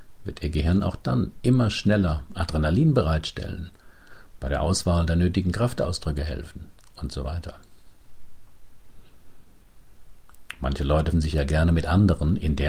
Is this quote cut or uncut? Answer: cut